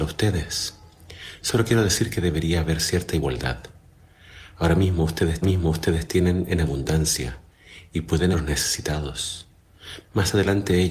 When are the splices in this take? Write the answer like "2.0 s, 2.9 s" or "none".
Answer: 5.4 s, 8.3 s